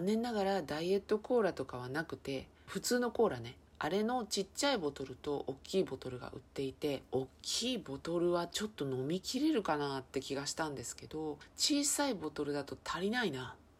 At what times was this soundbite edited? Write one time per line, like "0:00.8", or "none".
0:03.7
0:07.1